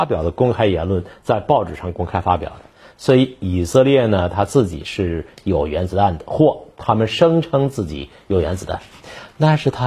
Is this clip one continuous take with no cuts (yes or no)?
yes